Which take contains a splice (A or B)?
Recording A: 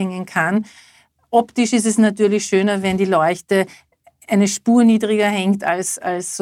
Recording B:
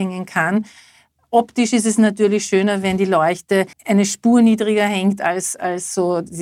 B